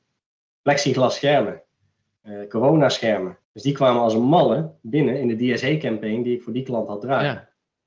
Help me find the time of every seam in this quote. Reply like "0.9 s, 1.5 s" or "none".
3.4 s